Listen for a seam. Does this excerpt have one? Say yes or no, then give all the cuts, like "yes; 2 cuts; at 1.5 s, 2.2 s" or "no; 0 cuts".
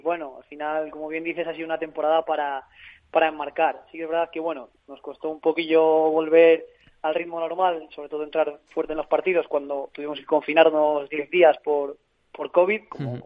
no; 0 cuts